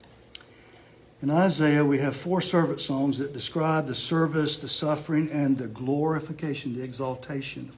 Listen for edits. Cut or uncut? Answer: uncut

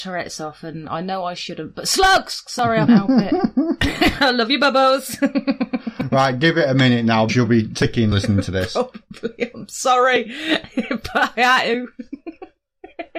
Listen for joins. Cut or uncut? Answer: cut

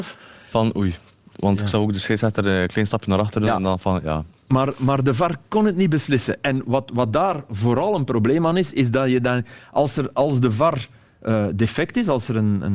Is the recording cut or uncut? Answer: uncut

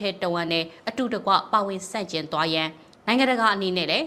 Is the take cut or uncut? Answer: cut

